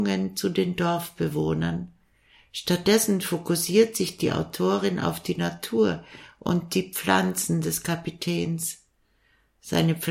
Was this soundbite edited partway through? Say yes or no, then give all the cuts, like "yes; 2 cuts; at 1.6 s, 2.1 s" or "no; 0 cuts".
no; 0 cuts